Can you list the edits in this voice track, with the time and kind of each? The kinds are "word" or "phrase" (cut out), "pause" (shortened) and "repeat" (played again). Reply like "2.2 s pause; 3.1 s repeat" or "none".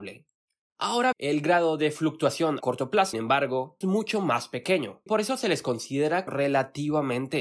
1.1 s word; 2.6 s word; 3.1 s word; 3.8 s word; 5.1 s word; 6.3 s word